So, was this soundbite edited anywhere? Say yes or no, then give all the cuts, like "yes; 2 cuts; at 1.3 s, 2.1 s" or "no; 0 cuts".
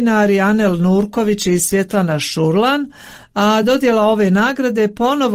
no; 0 cuts